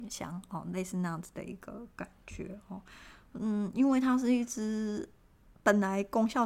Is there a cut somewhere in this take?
no; 0 cuts

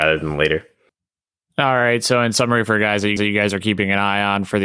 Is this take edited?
yes; 1 cut; at 3.2 s

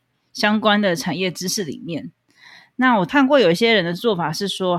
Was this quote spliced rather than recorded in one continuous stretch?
no; 0 cuts

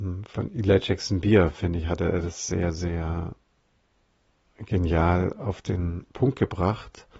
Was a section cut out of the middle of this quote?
no; 0 cuts

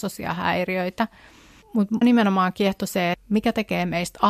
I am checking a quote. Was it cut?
yes; 2 cuts; at 2.0 s, 3.1 s

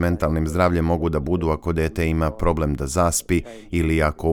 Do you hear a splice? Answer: no; 0 cuts

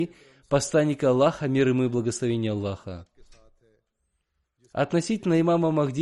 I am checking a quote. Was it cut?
no; 0 cuts

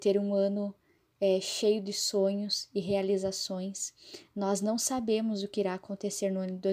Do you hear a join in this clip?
no; 0 cuts

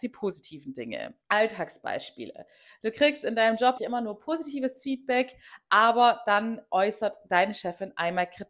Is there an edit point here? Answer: yes; 2 cuts; at 1.2 s, 3.8 s

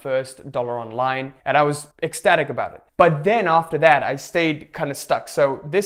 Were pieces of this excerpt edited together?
yes; 3 cuts; at 1.4 s, 1.9 s, 2.9 s

